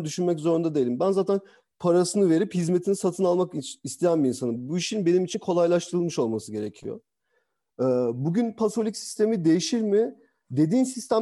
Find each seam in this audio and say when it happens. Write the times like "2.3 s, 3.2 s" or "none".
none